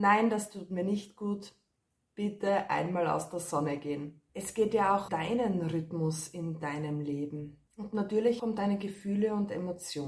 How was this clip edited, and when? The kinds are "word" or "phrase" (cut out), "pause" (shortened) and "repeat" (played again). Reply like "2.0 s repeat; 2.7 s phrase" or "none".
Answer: 4.3 s pause; 5.1 s word; 7.7 s pause; 8.4 s word